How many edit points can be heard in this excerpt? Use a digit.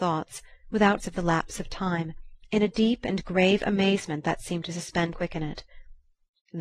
2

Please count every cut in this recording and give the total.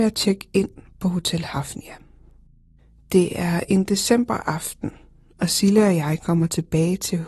0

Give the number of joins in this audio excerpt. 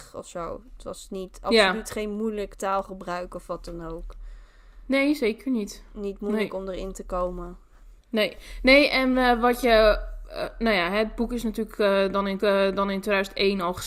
2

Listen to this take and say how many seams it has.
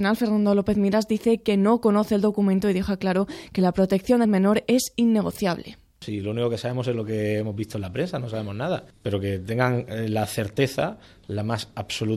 1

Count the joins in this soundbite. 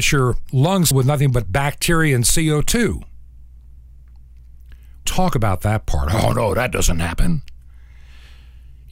3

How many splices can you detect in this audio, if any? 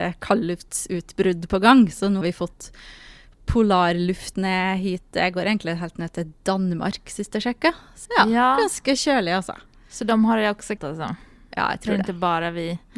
4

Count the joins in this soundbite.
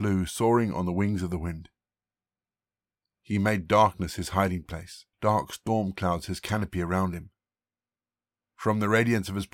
1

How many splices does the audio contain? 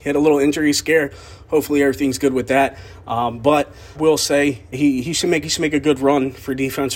3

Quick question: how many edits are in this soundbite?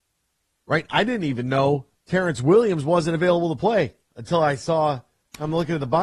1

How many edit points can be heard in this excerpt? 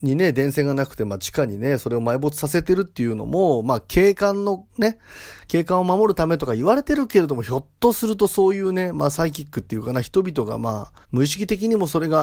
2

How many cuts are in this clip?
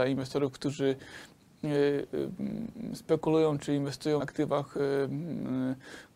1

